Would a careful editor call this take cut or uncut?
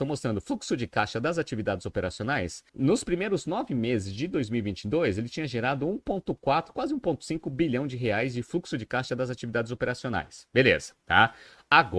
cut